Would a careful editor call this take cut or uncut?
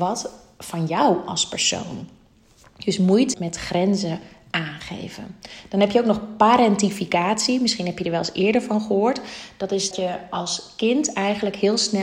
cut